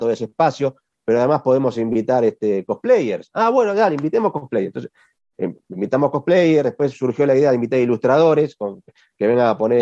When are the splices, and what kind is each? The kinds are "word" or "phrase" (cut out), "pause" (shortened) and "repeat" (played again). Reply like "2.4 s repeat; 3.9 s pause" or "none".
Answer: none